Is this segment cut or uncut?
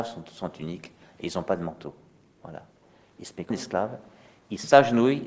cut